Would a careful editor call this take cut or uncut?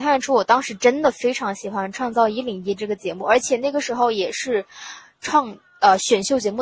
uncut